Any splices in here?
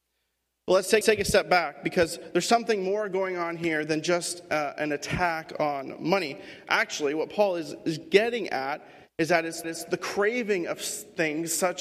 yes; 2 cuts; at 1.0 s, 9.6 s

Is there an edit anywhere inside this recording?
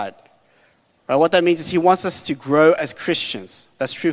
no; 0 cuts

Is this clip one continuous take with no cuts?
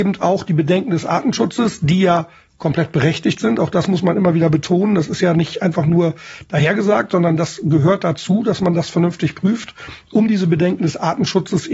yes; 0 cuts

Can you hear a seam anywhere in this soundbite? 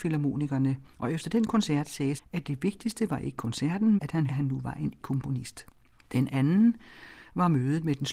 yes; 6 cuts; at 0.9 s, 2.2 s, 4.0 s, 4.3 s, 5.0 s, 5.9 s

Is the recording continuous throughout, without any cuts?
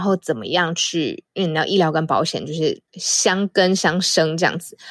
no; 1 cut; at 2.9 s

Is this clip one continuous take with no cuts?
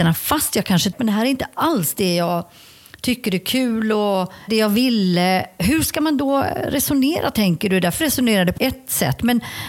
no; 4 cuts; at 0.9 s, 4.5 s, 8.0 s, 8.6 s

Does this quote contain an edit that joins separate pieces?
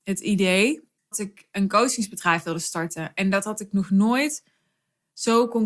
yes; 1 cut; at 1.1 s

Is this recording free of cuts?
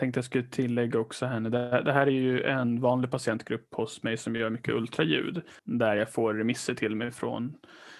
no; 1 cut; at 5.6 s

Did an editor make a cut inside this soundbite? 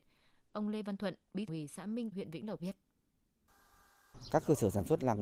yes; 3 cuts; at 1.5 s, 2.1 s, 2.6 s

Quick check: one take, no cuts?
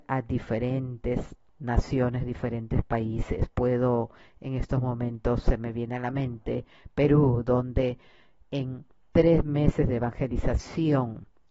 yes; 0 cuts

